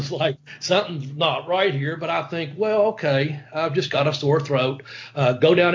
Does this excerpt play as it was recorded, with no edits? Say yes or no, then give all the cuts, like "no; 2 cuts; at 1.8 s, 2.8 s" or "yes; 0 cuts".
yes; 0 cuts